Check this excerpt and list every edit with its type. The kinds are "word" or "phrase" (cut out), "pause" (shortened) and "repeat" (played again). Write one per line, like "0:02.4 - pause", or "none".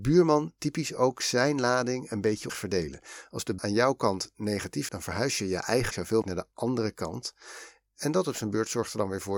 0:02.5 - word
0:03.6 - word
0:04.9 - word
0:05.9 - word
0:06.2 - word